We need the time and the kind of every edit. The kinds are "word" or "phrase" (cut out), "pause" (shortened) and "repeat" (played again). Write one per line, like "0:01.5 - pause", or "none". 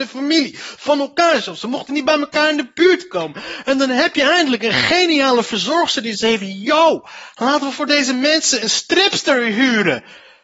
0:06.1 - word

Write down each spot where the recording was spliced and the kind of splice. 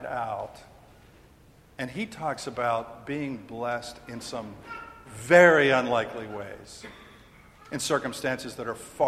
none

